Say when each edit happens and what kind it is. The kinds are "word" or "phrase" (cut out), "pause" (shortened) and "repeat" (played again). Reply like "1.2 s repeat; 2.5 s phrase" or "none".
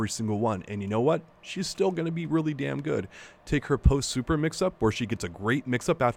none